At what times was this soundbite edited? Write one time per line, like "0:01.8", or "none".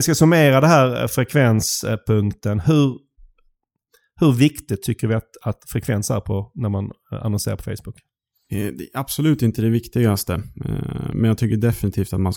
none